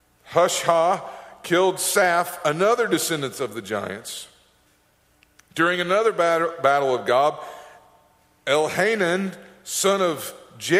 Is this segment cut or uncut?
uncut